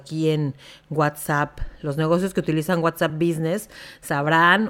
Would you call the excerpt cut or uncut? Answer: uncut